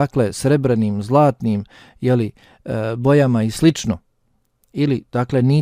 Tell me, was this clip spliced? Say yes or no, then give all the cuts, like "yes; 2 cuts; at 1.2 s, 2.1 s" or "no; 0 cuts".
no; 0 cuts